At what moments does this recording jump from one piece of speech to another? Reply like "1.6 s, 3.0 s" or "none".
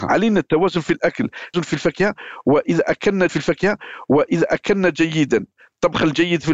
1.5 s, 3.3 s